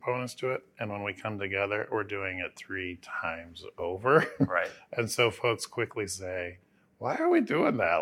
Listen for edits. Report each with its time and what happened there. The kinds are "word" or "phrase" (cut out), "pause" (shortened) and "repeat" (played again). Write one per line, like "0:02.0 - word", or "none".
none